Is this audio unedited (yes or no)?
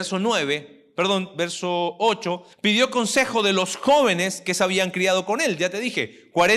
no